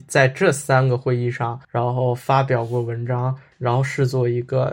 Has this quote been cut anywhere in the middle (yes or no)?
yes